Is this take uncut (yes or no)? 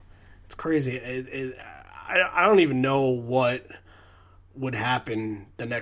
yes